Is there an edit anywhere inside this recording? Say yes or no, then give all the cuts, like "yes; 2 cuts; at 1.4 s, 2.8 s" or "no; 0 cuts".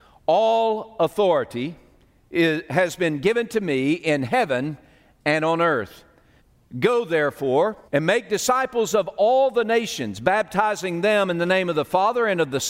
yes; 2 cuts; at 6.4 s, 7.9 s